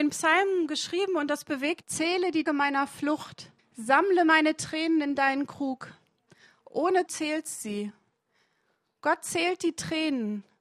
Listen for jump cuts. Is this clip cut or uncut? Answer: cut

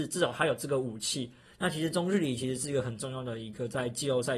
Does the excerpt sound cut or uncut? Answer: uncut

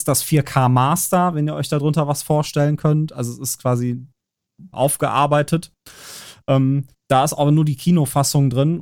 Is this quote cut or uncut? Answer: cut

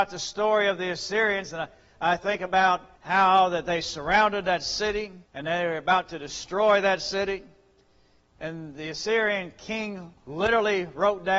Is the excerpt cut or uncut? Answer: cut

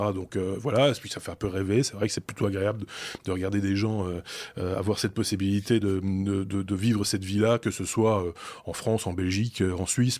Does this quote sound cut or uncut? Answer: uncut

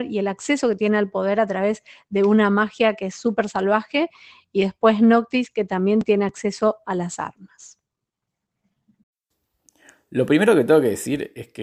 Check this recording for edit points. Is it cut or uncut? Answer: uncut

